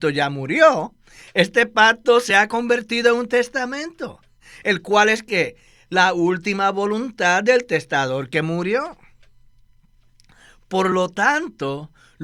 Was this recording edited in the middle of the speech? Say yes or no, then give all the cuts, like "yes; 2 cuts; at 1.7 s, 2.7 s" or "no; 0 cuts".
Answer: no; 0 cuts